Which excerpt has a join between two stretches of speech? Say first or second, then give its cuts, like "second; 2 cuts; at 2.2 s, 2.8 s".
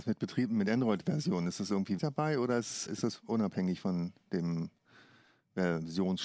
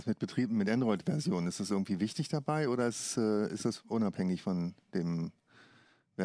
first; 2 cuts; at 2.0 s, 2.9 s